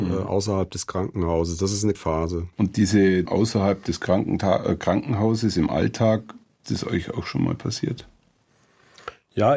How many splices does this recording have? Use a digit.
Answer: 4